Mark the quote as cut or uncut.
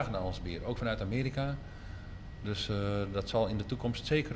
uncut